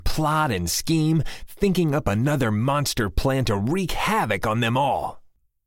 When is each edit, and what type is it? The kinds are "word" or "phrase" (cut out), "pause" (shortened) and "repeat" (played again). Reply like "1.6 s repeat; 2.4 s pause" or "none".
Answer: none